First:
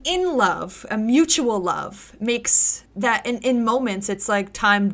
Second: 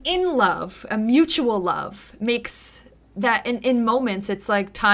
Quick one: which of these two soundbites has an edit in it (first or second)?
first